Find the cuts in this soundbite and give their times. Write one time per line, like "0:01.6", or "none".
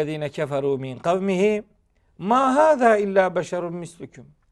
none